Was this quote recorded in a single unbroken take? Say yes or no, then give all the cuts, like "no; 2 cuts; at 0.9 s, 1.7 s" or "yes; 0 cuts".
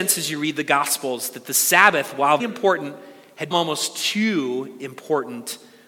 no; 2 cuts; at 2.4 s, 3.5 s